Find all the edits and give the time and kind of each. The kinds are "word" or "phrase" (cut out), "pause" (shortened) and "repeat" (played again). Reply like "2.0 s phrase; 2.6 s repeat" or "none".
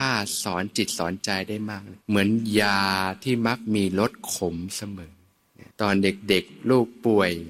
2.0 s pause; 5.7 s pause

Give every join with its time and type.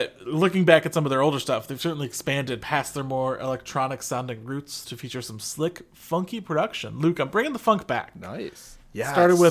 none

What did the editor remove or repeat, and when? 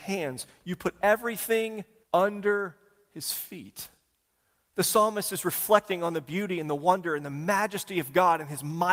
2.0 s pause

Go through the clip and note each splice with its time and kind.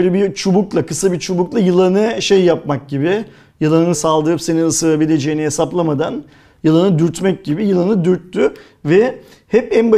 3.9 s word

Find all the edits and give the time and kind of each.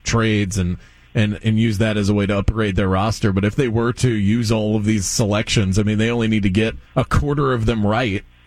6.9 s pause

